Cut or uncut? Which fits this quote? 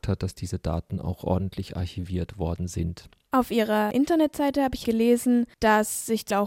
uncut